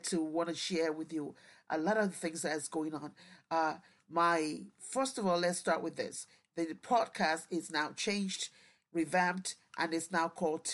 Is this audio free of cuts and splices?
yes; 0 cuts

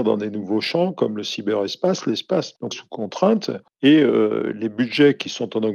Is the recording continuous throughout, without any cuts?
no; 1 cut; at 2.7 s

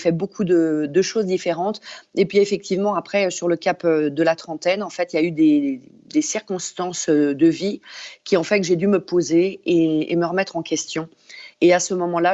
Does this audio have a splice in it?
no; 0 cuts

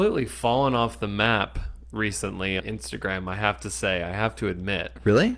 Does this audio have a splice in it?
yes; 1 cut; at 2.6 s

